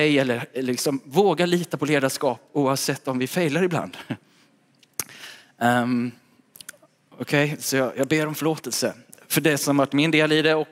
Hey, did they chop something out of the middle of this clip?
no; 0 cuts

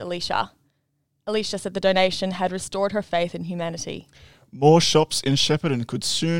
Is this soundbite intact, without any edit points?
yes; 0 cuts

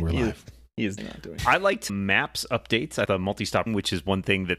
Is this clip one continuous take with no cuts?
no; 5 cuts; at 1.0 s, 1.4 s, 1.9 s, 3.1 s, 3.7 s

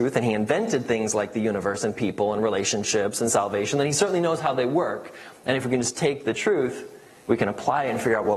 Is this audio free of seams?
yes; 0 cuts

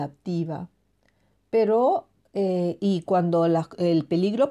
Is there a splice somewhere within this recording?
no; 0 cuts

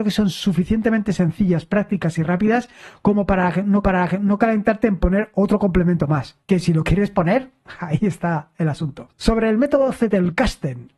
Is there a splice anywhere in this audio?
yes; 3 cuts; at 3.8 s, 6.4 s, 9.1 s

